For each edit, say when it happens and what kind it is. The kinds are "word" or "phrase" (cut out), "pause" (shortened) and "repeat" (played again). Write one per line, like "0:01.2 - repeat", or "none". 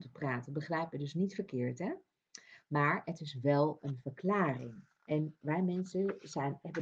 none